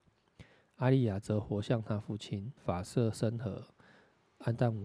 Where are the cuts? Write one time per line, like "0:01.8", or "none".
0:02.6